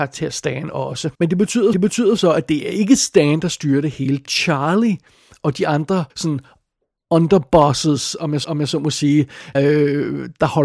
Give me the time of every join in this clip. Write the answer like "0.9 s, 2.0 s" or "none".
1.1 s, 1.7 s, 4.2 s, 6.1 s, 8.4 s, 9.5 s